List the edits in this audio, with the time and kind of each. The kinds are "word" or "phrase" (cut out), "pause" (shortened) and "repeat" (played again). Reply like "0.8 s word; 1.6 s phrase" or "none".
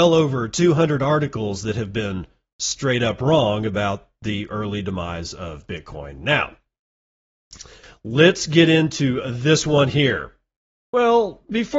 none

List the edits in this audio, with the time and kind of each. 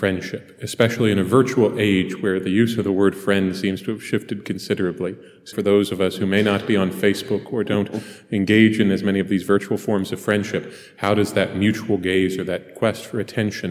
5.5 s word

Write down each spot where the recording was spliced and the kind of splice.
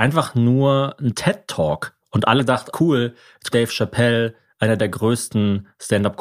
2.4 s word; 2.7 s word; 3.5 s word

